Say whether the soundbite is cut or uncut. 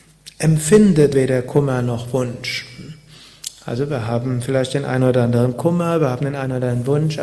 cut